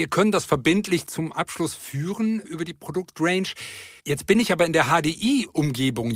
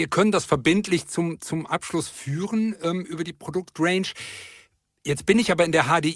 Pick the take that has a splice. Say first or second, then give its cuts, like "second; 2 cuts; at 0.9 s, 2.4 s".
first; 3 cuts; at 1.1 s, 2.4 s, 4.0 s